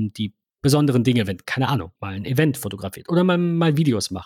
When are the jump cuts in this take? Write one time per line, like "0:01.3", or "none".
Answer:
0:01.9